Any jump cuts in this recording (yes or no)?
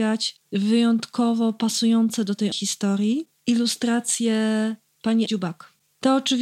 yes